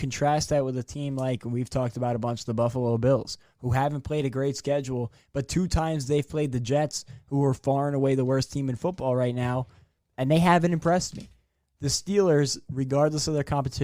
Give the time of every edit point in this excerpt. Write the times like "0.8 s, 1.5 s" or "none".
none